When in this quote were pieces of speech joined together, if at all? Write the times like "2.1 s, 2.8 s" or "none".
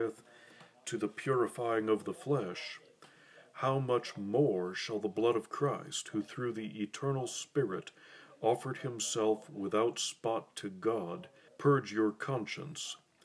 11.5 s